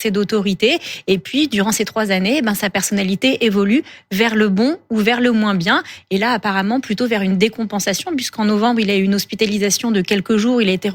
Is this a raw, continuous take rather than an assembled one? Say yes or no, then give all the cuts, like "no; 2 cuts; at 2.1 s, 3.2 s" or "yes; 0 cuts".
yes; 0 cuts